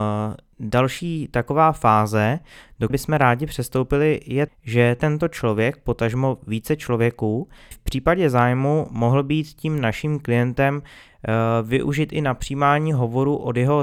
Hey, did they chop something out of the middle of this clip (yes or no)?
yes